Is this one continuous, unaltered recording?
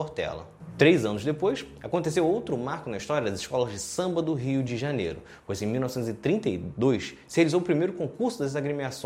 yes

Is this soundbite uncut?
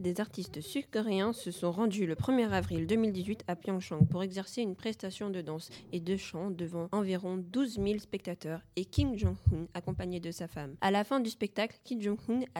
yes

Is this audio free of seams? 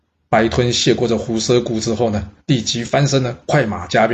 no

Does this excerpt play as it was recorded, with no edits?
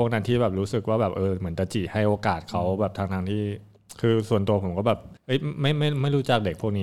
no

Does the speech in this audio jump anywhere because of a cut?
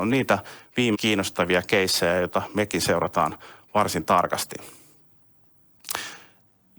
yes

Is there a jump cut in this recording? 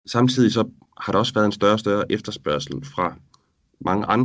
no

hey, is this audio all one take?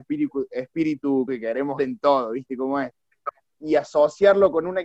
no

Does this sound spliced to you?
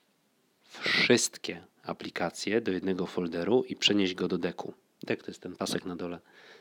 no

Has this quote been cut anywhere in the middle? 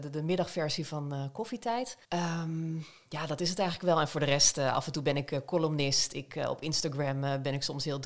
yes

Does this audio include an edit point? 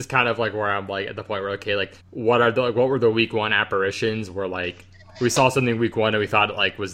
yes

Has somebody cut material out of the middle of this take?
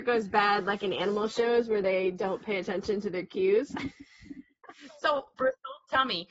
yes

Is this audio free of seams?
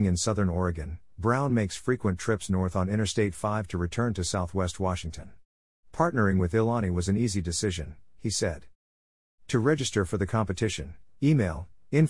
yes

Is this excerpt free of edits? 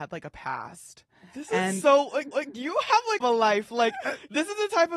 no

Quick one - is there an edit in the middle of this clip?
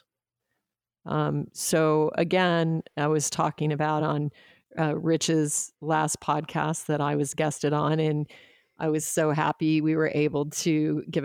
no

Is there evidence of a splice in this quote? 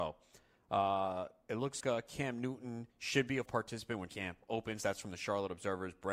yes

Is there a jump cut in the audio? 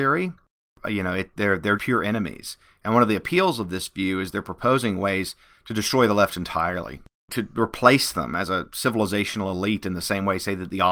yes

